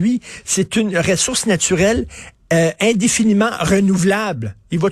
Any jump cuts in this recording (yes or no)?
no